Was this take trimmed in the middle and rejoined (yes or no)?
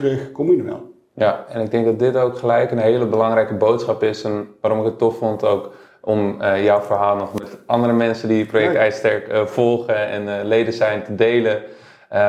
no